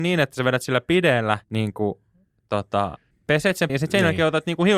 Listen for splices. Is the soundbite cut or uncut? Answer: cut